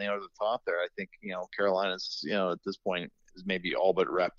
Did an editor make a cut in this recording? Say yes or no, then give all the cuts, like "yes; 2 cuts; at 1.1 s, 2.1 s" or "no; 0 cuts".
no; 0 cuts